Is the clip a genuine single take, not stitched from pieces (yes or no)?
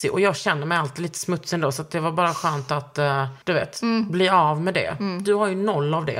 no